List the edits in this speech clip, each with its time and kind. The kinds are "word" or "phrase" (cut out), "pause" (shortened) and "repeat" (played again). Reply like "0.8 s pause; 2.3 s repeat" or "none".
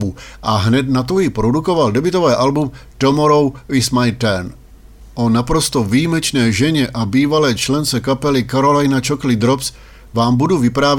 none